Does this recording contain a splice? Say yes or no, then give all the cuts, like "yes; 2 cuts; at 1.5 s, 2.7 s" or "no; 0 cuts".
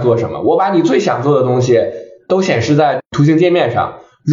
no; 0 cuts